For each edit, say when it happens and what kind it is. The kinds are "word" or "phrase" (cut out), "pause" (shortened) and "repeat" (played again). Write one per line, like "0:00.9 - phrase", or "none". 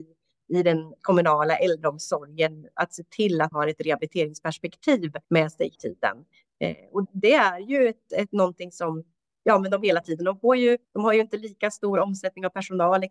0:01.0 - word
0:03.5 - word
0:05.2 - pause
0:05.7 - word
0:07.0 - word
0:10.8 - pause